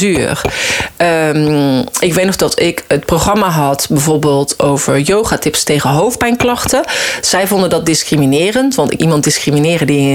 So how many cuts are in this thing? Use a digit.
1